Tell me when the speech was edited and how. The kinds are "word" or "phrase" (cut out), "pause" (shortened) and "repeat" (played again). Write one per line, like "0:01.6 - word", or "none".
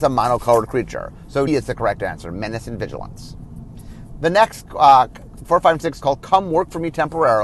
0:01.5 - word
0:05.4 - phrase
0:06.0 - phrase